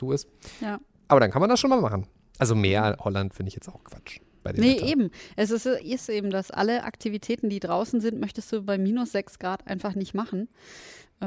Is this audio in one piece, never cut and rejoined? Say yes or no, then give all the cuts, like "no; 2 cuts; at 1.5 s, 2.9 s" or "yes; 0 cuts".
yes; 0 cuts